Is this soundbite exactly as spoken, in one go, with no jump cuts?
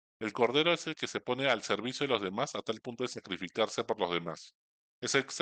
yes; 0 cuts

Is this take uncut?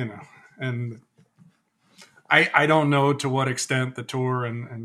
yes; 0 cuts

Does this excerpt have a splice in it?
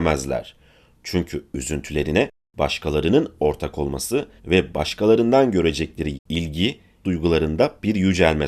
yes; 3 cuts; at 4.4 s, 6.1 s, 7.0 s

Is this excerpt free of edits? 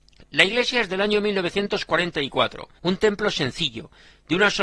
no; 1 cut; at 2.8 s

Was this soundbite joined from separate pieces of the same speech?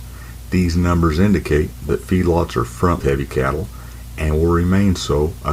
yes; 1 cut; at 3.0 s

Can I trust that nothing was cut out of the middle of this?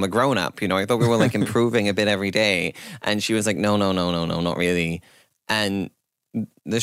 yes; 0 cuts

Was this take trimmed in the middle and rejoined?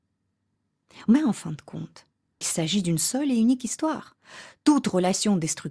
yes; 1 cut; at 2.4 s

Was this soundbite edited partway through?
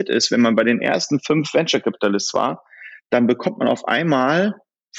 no; 0 cuts

